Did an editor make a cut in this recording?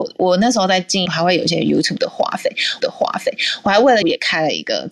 yes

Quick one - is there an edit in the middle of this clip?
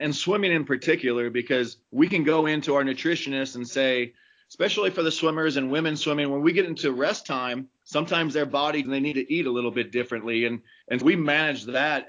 yes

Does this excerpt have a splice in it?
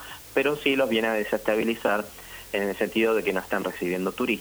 no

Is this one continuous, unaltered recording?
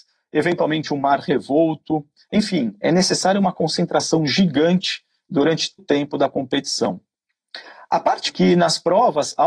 no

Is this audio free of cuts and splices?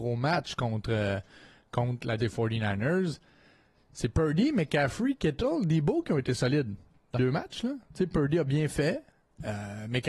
no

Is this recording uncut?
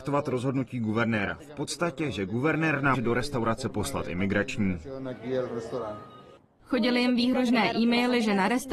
no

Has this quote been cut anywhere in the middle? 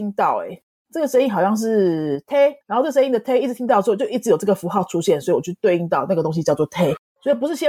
yes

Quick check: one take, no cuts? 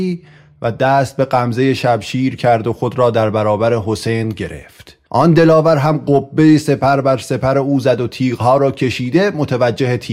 no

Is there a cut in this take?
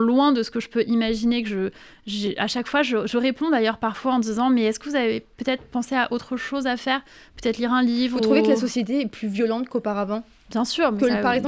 no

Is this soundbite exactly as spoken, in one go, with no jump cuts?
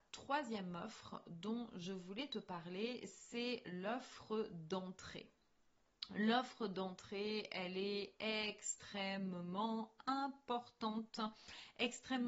yes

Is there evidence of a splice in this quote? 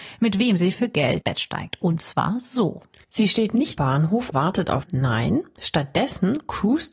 yes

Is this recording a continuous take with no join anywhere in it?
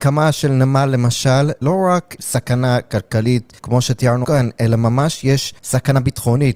no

